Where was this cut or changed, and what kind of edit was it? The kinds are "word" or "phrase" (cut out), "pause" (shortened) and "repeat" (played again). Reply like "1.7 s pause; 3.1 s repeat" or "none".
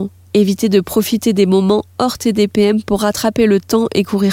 none